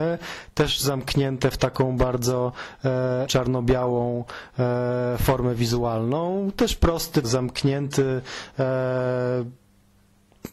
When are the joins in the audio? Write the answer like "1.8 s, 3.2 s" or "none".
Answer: 3.3 s, 7.2 s